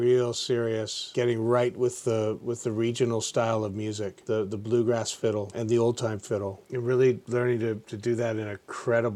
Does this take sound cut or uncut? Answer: uncut